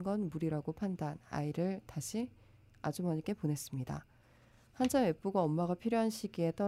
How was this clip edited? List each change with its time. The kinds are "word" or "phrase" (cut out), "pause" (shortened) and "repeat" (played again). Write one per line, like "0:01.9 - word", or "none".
none